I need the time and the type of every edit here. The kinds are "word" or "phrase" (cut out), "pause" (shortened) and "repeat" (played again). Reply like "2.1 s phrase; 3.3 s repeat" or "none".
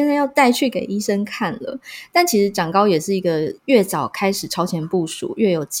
3.6 s pause